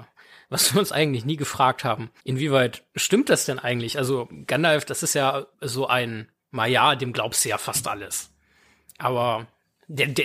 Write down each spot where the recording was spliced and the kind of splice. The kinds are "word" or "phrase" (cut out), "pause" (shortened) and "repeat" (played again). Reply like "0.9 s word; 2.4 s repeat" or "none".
2.2 s pause; 5.5 s pause